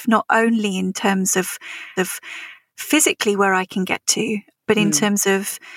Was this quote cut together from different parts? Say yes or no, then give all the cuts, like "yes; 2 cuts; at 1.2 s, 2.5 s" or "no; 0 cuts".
yes; 1 cut; at 2.0 s